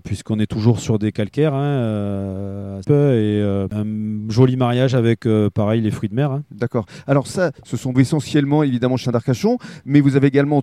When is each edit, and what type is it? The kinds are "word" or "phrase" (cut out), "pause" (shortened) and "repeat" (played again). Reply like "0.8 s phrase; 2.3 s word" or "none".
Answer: 2.8 s word; 7.9 s phrase; 9.0 s phrase